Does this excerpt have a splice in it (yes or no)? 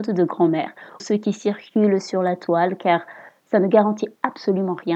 yes